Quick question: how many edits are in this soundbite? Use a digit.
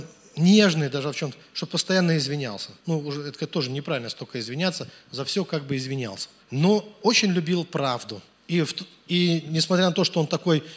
3